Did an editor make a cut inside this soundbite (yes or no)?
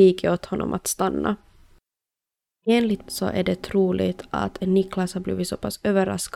yes